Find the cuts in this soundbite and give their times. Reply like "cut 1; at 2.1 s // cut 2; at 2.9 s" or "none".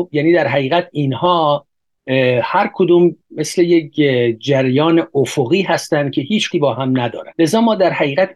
cut 1; at 6.5 s